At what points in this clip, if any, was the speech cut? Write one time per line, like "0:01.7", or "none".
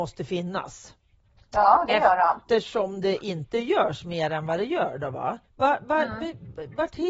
0:01.3
0:05.5